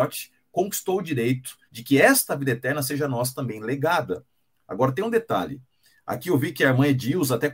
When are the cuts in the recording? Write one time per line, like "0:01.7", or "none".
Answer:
0:01.7